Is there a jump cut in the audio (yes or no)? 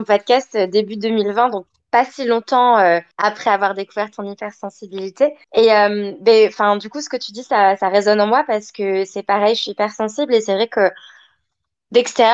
yes